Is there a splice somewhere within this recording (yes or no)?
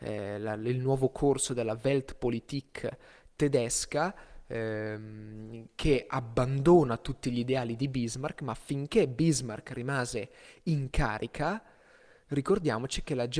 no